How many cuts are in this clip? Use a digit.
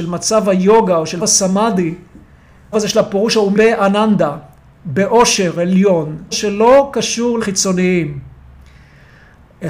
5